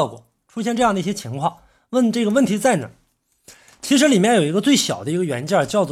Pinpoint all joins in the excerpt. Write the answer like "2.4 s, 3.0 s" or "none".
none